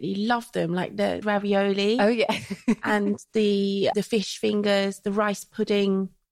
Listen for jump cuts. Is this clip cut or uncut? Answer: cut